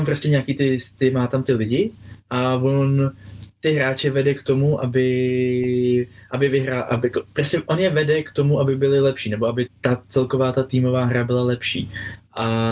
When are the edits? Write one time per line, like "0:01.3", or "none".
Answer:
0:09.7